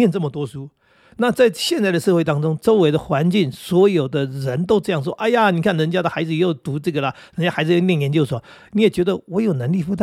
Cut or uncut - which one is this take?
uncut